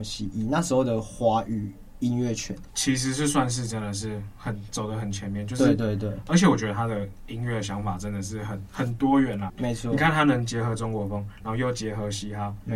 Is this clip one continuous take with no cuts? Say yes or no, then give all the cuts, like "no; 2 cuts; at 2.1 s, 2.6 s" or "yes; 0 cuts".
no; 1 cut; at 9.5 s